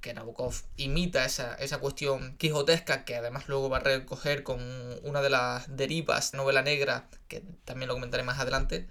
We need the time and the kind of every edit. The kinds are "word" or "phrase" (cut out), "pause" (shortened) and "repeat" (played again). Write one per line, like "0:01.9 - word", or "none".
0:06.3 - phrase